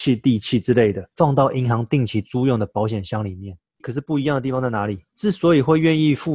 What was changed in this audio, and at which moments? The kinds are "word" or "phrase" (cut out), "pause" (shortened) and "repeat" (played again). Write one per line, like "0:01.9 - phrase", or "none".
0:01.1 - pause
0:03.8 - word
0:05.1 - pause